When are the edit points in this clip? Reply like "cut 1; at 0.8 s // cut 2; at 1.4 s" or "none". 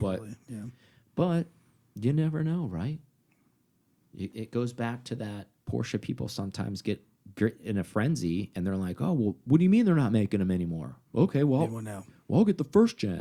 cut 1; at 5.6 s // cut 2; at 11.1 s